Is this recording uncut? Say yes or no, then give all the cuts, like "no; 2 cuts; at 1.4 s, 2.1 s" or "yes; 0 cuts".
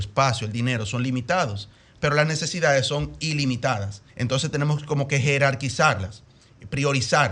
no; 1 cut; at 4.1 s